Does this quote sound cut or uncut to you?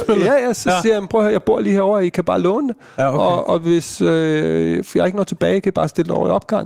uncut